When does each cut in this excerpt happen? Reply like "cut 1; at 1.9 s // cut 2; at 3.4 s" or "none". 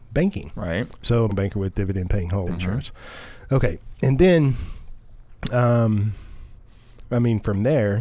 cut 1; at 1.3 s // cut 2; at 2.5 s